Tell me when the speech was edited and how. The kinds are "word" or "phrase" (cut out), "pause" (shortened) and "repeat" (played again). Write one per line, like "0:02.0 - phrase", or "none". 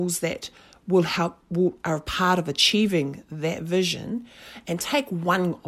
none

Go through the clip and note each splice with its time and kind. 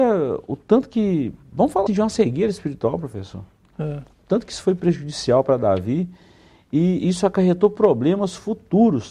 0:01.9 - word

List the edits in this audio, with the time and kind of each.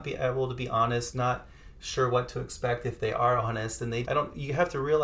0:01.1 - word
0:04.0 - word

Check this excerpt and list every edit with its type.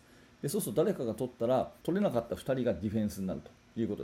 0:01.8 - pause

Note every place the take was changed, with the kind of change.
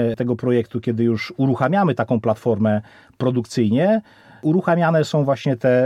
none

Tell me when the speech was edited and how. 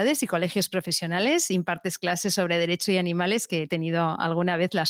none

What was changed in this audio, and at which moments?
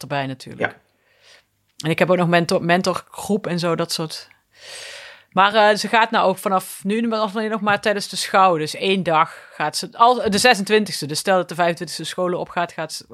none

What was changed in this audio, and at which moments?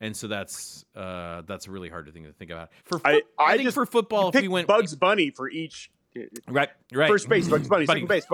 0:02.8 - pause
0:06.8 - pause

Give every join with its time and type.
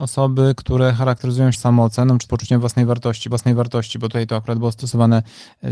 0:01.5 - phrase
0:02.3 - word
0:03.3 - repeat

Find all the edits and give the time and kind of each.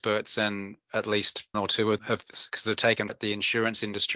0:01.5 - word
0:02.0 - word
0:03.1 - word

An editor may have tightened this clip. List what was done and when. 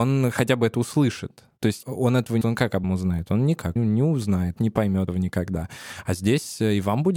0:01.8 - word
0:02.4 - word
0:02.8 - word
0:03.8 - word
0:04.6 - word
0:05.1 - word

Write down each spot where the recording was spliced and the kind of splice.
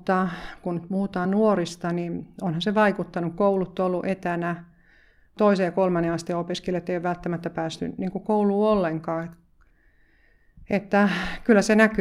none

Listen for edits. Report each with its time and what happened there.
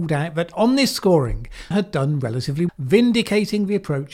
0:01.7 - word
0:02.7 - word

